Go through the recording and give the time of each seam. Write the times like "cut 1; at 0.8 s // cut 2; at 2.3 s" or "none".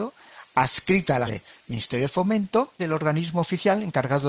cut 1; at 1.3 s // cut 2; at 2.8 s